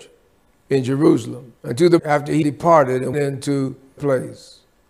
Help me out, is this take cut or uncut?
cut